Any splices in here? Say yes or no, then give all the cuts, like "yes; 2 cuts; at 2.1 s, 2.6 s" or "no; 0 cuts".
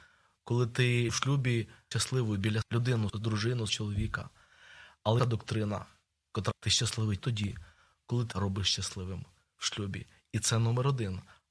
yes; 9 cuts; at 1.1 s, 1.9 s, 2.6 s, 3.1 s, 3.7 s, 5.2 s, 6.5 s, 7.2 s, 8.3 s